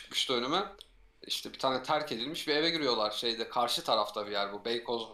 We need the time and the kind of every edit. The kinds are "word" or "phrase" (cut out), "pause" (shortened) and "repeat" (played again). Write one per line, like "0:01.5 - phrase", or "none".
none

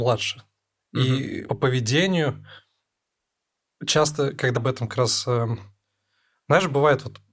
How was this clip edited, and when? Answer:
0:01.5 - word
0:04.6 - word

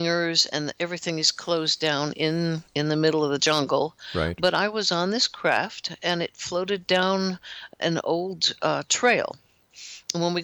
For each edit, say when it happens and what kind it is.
0:02.7 - pause

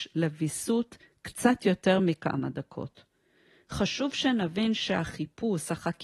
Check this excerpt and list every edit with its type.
none

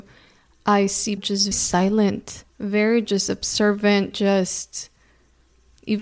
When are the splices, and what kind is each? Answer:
0:01.2 - word
0:01.5 - word
0:02.5 - pause
0:04.1 - word

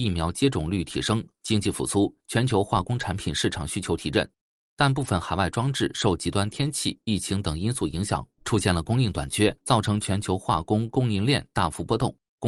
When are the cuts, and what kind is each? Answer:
0:02.2 - pause
0:09.6 - pause

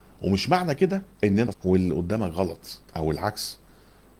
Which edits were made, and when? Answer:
0:01.1 - pause
0:01.5 - word
0:02.9 - pause

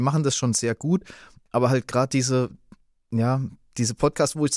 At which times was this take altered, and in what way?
none

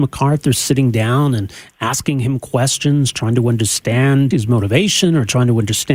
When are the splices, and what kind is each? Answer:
0:04.3 - word

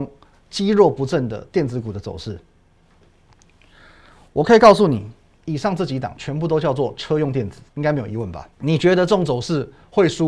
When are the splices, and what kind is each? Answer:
0:07.7 - pause
0:08.5 - pause

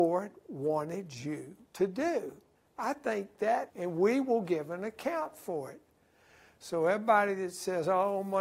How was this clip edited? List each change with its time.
0:01.7 - pause
0:02.6 - pause
0:03.7 - phrase

